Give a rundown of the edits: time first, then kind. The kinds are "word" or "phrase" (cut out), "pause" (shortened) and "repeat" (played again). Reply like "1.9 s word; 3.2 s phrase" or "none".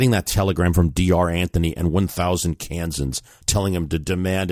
none